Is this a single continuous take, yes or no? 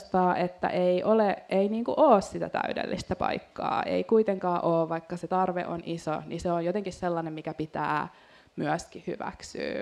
yes